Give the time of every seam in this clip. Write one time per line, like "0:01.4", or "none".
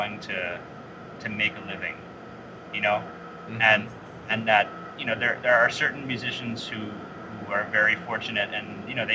none